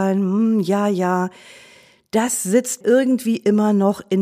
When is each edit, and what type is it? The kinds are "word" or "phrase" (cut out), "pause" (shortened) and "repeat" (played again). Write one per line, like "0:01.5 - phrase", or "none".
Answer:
0:02.8 - word